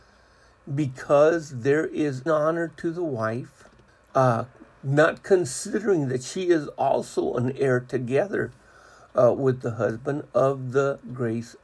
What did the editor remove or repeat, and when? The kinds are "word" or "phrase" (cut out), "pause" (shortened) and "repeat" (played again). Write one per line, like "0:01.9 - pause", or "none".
0:02.3 - phrase
0:03.9 - pause